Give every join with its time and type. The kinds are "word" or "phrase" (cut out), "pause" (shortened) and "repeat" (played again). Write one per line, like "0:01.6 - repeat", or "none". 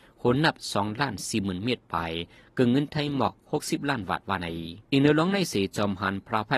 0:04.8 - pause